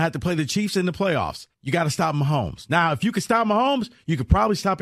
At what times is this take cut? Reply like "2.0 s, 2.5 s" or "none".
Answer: 1.5 s